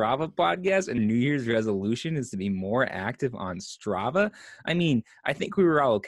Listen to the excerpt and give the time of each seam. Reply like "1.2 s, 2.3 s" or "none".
1.0 s